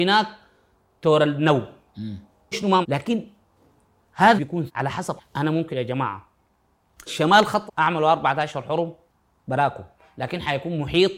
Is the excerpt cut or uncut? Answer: cut